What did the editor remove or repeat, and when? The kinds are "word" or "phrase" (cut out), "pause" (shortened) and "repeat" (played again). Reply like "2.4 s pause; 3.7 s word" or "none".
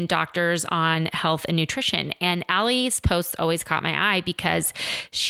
none